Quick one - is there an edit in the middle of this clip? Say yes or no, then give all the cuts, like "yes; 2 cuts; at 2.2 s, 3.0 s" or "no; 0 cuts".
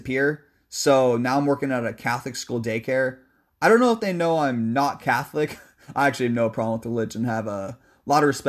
no; 0 cuts